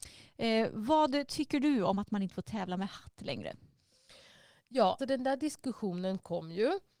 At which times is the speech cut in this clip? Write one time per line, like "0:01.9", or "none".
0:05.0